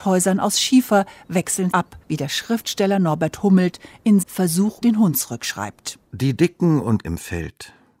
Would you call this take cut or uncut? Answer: cut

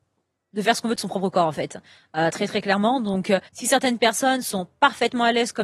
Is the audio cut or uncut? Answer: cut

